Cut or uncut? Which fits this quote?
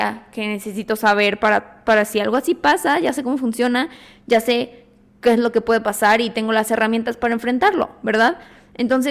uncut